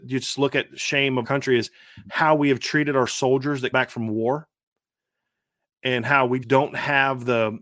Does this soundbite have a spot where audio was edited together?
yes; 3 cuts; at 1.2 s, 3.7 s, 6.4 s

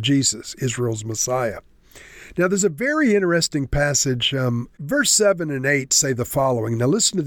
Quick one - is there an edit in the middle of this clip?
yes; 1 cut; at 4.7 s

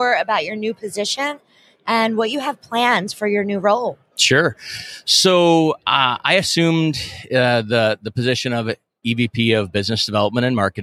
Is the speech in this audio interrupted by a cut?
no; 0 cuts

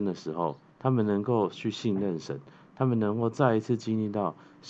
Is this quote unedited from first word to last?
yes; 0 cuts

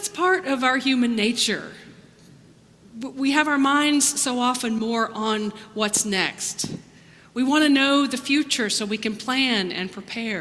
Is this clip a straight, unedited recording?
yes; 0 cuts

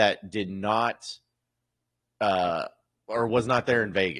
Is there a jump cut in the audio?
no; 0 cuts

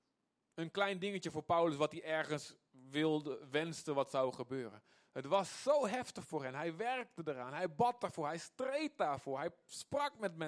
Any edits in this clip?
no; 0 cuts

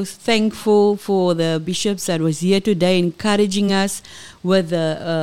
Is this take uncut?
yes; 0 cuts

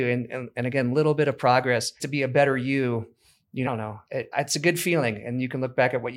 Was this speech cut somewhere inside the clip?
yes; 3 cuts; at 2.0 s, 3.7 s, 4.3 s

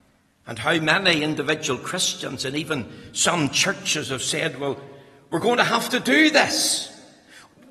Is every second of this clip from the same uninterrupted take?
yes; 0 cuts

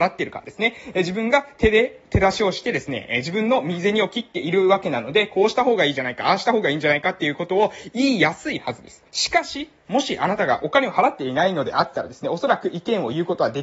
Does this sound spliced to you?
yes; 1 cut; at 9.1 s

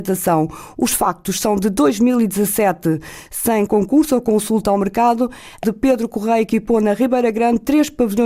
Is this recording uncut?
no; 2 cuts; at 3.7 s, 5.6 s

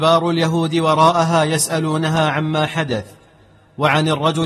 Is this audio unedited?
yes; 0 cuts

